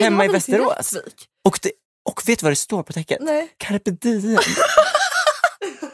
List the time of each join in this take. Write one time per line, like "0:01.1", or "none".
none